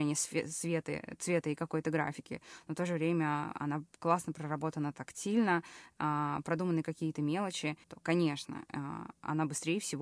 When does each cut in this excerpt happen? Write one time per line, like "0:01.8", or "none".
0:07.8